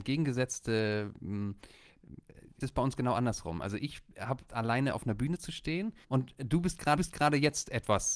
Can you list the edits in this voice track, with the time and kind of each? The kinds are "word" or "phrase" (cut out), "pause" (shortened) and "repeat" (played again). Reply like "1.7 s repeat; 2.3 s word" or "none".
2.6 s phrase; 4.5 s word; 6.0 s pause; 7.0 s repeat